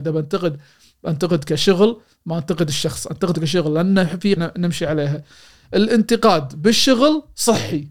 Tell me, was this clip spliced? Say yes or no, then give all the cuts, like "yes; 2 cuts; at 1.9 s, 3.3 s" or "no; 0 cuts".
yes; 1 cut; at 4.4 s